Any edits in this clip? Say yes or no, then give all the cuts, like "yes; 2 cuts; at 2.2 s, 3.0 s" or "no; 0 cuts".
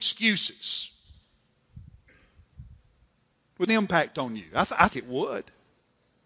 yes; 2 cuts; at 3.7 s, 4.9 s